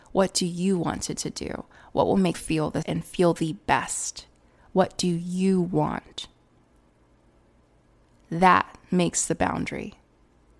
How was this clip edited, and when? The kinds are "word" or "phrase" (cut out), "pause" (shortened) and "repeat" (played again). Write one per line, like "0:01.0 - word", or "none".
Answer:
0:01.2 - repeat
0:02.3 - word
0:02.8 - word